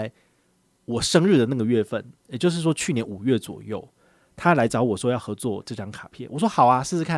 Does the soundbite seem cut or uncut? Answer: uncut